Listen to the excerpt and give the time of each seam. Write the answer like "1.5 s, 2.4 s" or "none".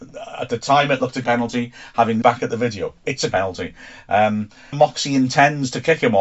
1.2 s, 2.2 s, 3.3 s, 4.7 s